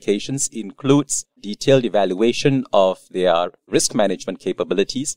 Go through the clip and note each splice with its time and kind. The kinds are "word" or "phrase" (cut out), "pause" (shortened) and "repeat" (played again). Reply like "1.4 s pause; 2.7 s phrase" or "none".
1.4 s word

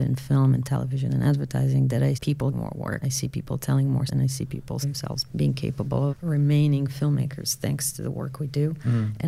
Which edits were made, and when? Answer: 2.1 s word; 2.5 s word; 3.0 s word; 4.1 s word; 4.8 s word; 5.3 s word; 6.1 s word

